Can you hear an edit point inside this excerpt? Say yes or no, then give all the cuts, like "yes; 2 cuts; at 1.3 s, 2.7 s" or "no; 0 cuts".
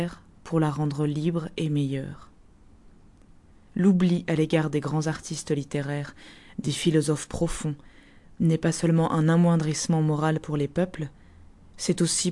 no; 0 cuts